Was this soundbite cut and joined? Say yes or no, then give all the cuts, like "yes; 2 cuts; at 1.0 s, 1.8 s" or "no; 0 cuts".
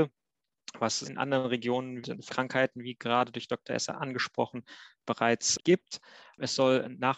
yes; 3 cuts; at 1.0 s, 2.3 s, 5.6 s